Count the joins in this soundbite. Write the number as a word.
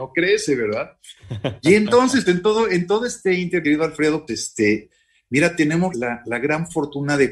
four